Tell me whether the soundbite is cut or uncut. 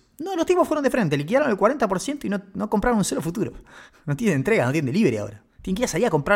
uncut